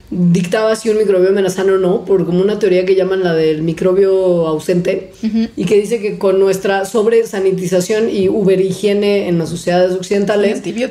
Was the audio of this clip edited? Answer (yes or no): no